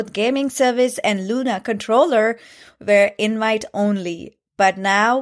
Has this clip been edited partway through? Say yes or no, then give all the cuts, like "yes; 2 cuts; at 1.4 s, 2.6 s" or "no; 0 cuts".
no; 0 cuts